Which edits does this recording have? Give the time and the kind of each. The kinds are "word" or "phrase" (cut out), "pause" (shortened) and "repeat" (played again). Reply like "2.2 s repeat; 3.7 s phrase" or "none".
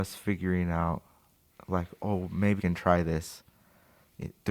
2.6 s word